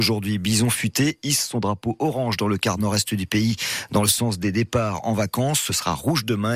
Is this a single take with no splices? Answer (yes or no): yes